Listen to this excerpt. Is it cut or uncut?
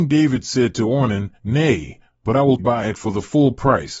cut